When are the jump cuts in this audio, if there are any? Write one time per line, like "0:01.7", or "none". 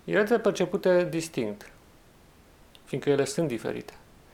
none